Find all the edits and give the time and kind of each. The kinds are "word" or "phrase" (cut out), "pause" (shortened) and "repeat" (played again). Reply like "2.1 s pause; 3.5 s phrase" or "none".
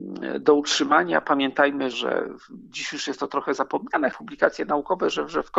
1.9 s word; 4.1 s phrase